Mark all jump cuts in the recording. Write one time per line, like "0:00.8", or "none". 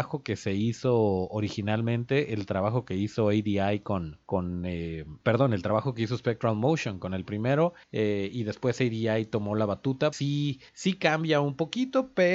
0:04.2
0:05.2
0:07.8
0:10.1
0:10.7